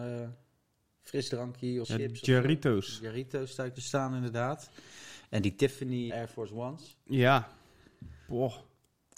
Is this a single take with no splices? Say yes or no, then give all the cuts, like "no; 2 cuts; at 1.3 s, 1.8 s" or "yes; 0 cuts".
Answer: no; 3 cuts; at 1.8 s, 3.8 s, 6.1 s